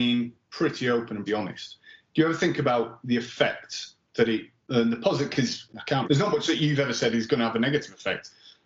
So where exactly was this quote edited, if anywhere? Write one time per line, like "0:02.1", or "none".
0:01.3
0:04.6
0:06.0